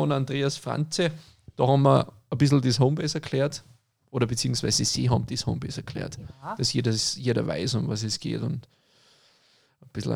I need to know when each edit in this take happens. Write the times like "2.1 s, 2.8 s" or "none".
none